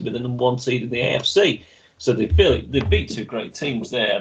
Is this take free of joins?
yes; 0 cuts

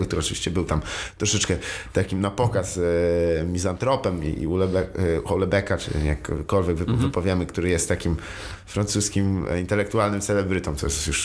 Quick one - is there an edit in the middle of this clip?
no; 0 cuts

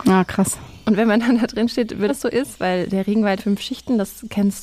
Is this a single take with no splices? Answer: no; 2 cuts; at 2.1 s, 3.4 s

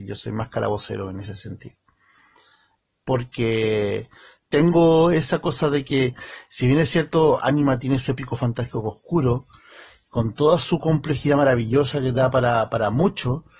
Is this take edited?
no; 0 cuts

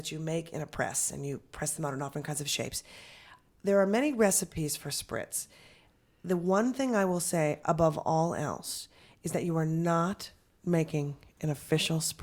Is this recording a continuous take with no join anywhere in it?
yes; 0 cuts

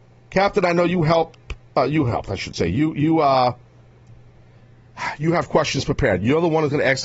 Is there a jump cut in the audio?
no; 0 cuts

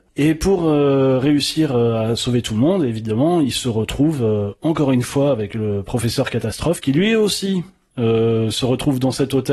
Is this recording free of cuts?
yes; 0 cuts

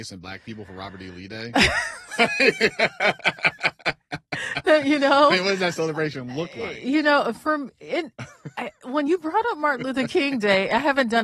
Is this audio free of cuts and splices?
yes; 0 cuts

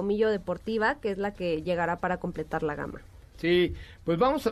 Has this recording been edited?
no; 0 cuts

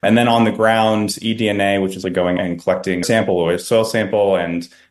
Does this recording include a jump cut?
yes; 3 cuts; at 2.0 s, 2.4 s, 3.0 s

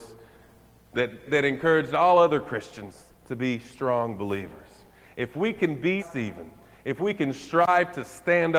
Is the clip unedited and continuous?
no; 2 cuts; at 1.3 s, 6.0 s

